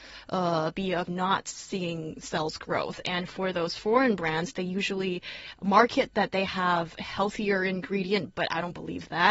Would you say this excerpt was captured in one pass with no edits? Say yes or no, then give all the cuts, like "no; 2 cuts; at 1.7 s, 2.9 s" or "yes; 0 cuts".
no; 1 cut; at 1.0 s